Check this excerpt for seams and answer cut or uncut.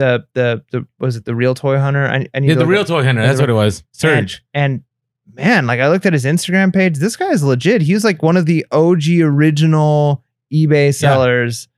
uncut